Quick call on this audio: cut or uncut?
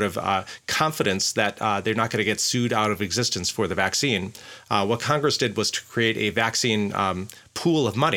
uncut